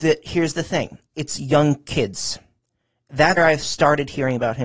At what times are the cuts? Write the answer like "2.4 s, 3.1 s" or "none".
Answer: 1.1 s, 3.4 s